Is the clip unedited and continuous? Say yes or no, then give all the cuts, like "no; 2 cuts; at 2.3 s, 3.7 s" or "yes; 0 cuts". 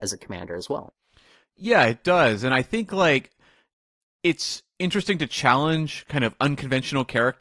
yes; 0 cuts